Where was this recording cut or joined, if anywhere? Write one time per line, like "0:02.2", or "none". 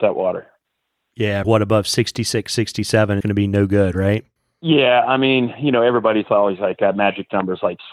0:01.4
0:03.2
0:04.4